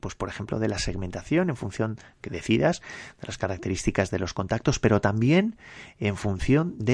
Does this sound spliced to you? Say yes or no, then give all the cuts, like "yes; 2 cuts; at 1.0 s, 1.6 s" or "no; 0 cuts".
no; 0 cuts